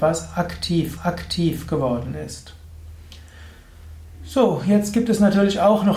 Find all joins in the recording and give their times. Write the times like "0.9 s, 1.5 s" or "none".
1.0 s